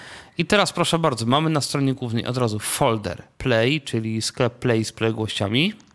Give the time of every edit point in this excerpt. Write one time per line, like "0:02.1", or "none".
none